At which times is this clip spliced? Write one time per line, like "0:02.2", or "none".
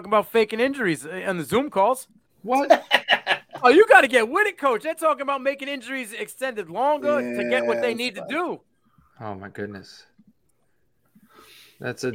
none